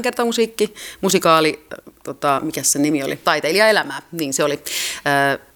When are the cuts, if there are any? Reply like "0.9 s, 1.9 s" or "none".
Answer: 3.2 s